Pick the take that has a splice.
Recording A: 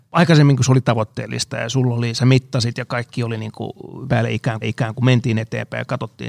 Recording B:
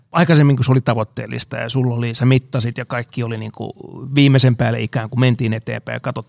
A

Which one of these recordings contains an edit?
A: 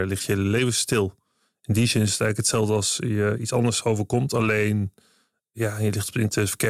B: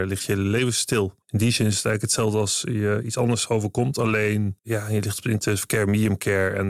B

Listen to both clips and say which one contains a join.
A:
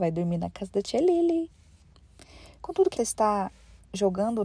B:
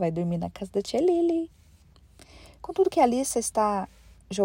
A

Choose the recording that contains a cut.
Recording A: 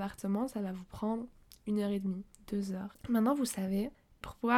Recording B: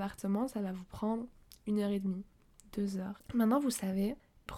A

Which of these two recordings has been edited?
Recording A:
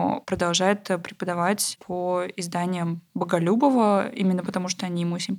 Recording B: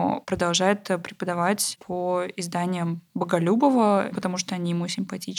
B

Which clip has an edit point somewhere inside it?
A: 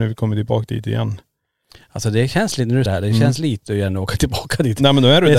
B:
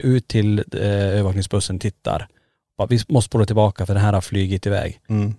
A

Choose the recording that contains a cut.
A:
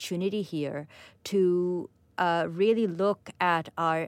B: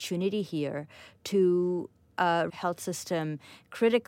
B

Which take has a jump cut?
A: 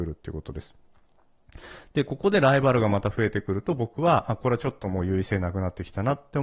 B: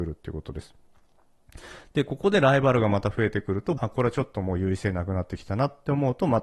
B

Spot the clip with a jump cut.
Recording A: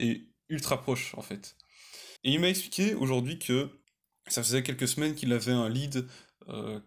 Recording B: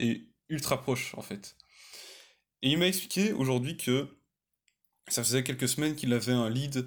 A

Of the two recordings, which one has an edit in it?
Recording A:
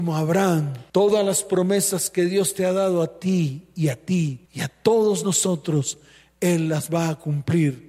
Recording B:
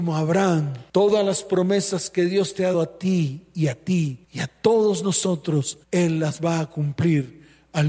B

